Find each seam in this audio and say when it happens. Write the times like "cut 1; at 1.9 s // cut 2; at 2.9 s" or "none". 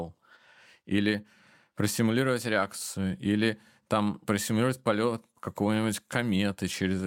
none